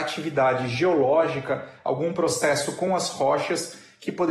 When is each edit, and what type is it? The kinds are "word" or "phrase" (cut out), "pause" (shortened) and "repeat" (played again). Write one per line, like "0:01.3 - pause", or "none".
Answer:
none

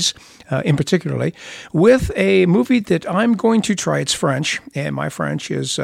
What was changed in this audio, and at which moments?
none

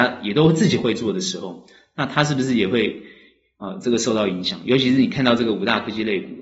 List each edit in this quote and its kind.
none

